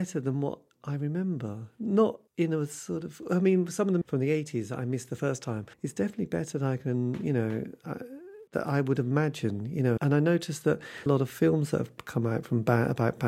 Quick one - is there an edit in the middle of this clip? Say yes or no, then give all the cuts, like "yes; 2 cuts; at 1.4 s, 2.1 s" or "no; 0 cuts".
yes; 6 cuts; at 2.3 s, 4.0 s, 5.7 s, 8.5 s, 10.0 s, 11.1 s